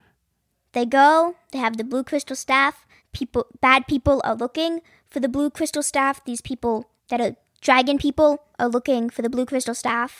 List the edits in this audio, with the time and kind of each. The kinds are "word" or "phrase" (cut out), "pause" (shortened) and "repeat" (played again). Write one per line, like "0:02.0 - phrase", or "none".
0:03.0 - pause
0:07.0 - pause
0:08.5 - pause